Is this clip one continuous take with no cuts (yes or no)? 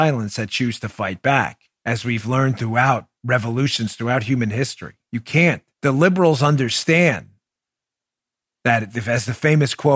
no